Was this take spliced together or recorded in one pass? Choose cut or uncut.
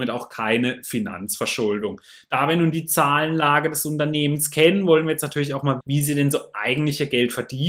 cut